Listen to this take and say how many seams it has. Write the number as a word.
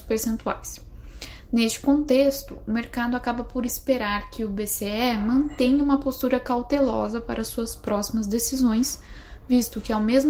zero